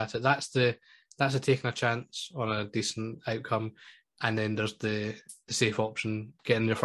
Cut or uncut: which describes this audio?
uncut